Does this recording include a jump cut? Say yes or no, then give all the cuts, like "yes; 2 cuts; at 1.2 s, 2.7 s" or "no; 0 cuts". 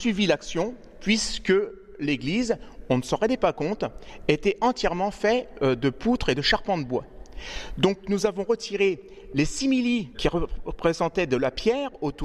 no; 0 cuts